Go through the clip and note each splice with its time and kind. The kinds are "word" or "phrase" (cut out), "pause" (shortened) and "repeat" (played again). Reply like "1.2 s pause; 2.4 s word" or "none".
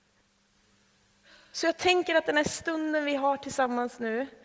none